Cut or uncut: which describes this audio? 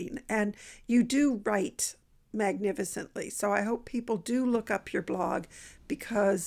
uncut